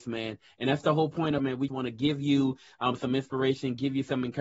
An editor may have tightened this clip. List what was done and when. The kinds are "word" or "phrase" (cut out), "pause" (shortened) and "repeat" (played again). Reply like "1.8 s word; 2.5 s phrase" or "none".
1.4 s phrase; 1.7 s word